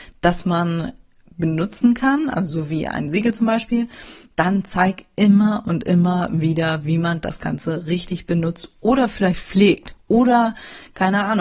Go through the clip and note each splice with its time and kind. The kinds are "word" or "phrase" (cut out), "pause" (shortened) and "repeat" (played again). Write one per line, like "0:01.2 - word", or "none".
none